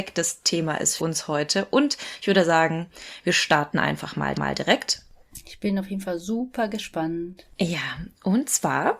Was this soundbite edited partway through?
yes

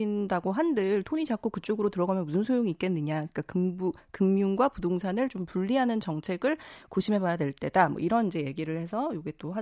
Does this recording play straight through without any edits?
yes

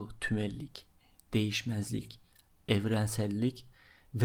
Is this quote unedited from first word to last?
yes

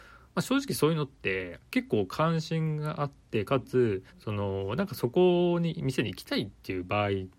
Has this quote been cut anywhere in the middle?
yes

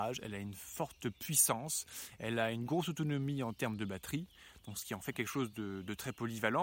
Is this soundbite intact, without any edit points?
yes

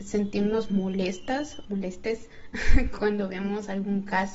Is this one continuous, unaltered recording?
no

